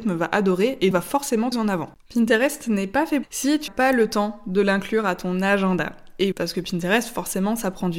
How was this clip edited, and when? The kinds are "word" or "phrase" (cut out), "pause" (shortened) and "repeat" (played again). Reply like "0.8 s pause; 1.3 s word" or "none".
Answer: 0.9 s word; 1.5 s phrase; 3.2 s phrase; 3.7 s word; 6.3 s word